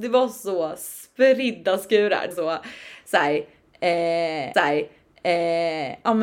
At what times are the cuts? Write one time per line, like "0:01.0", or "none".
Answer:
0:02.3
0:04.5